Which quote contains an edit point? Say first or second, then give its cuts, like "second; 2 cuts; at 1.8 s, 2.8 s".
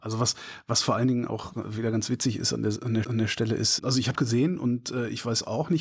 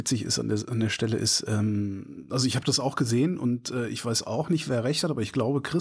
first; 3 cuts; at 3.0 s, 3.8 s, 4.2 s